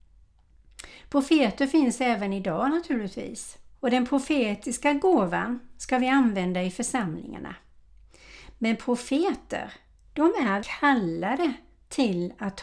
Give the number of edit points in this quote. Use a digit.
2